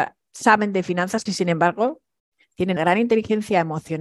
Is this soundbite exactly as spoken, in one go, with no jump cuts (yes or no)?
no